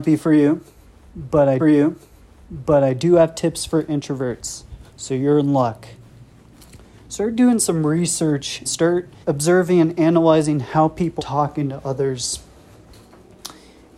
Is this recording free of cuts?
no; 6 cuts; at 1.6 s, 4.9 s, 6.9 s, 8.7 s, 9.2 s, 11.2 s

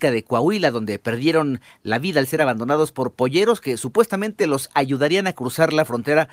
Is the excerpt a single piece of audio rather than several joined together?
yes; 0 cuts

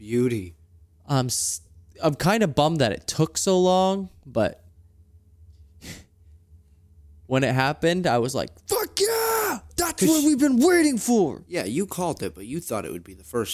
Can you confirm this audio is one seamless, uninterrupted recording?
yes; 0 cuts

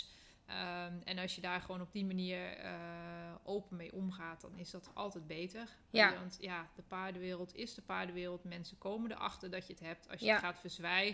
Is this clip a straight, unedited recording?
yes; 0 cuts

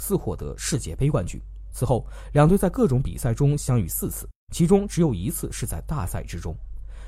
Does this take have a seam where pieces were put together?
yes; 1 cut; at 4.4 s

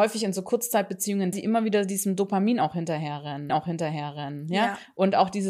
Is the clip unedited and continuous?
no; 2 cuts; at 1.3 s, 3.5 s

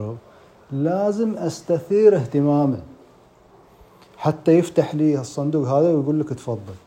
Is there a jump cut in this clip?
no; 0 cuts

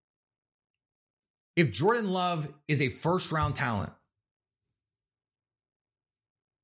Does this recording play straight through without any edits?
yes; 0 cuts

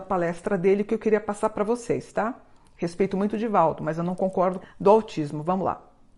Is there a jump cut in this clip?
yes; 1 cut; at 4.6 s

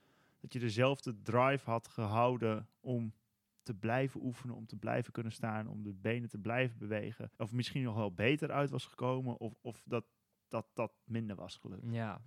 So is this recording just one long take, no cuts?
no; 1 cut; at 7.3 s

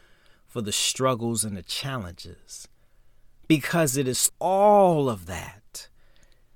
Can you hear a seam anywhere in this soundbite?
yes; 1 cut; at 4.3 s

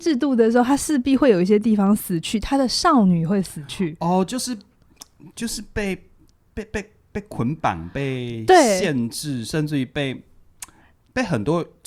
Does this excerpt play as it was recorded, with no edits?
yes; 0 cuts

